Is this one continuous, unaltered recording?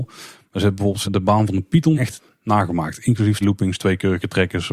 no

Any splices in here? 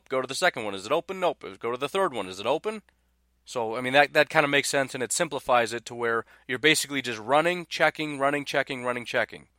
no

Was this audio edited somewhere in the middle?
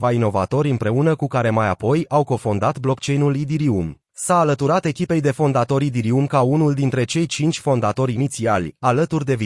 yes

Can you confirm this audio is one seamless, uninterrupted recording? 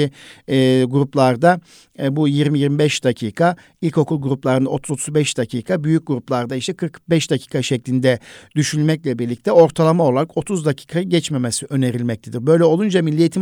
yes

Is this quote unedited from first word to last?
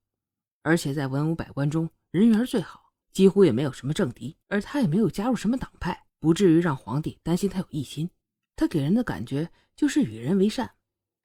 no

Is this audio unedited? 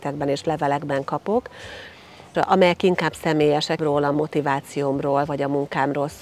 no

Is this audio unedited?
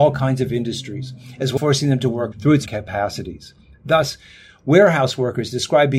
no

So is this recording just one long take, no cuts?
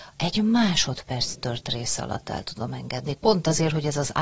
yes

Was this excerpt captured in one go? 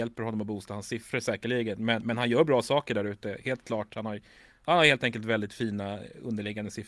yes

